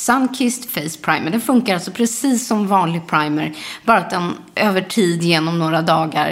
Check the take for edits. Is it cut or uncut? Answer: uncut